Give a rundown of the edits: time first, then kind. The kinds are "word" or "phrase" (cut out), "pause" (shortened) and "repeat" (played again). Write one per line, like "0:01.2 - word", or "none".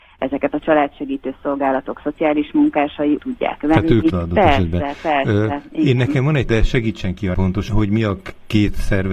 0:03.2 - phrase
0:04.1 - phrase
0:06.5 - word
0:07.3 - word
0:07.7 - word